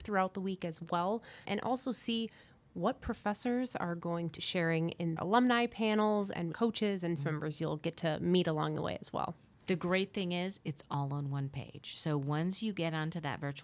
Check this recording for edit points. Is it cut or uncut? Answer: cut